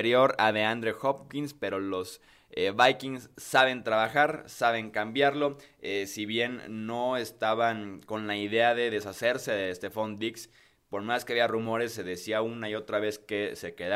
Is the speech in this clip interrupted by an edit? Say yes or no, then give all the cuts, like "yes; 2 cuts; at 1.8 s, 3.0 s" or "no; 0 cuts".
no; 0 cuts